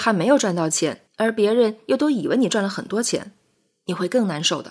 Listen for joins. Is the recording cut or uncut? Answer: cut